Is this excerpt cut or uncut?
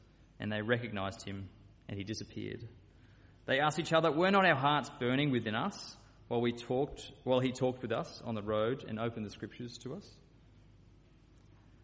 uncut